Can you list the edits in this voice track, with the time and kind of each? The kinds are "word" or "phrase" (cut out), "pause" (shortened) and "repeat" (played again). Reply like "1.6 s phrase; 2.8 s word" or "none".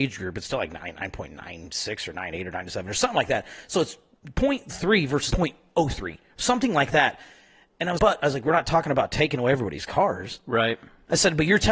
5.3 s word; 8.0 s word